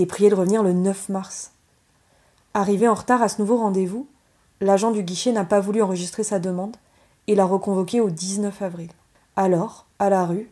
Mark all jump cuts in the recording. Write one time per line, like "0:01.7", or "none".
none